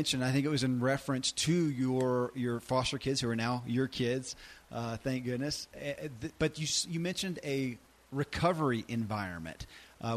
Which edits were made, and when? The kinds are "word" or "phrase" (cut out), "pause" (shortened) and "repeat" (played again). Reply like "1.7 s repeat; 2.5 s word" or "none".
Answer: none